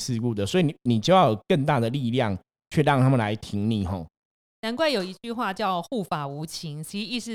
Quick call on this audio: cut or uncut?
uncut